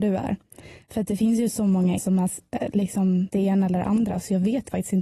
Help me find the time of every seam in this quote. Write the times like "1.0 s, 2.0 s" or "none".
2.0 s, 3.3 s